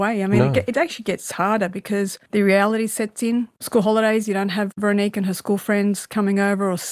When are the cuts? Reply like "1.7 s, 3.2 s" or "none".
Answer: 2.3 s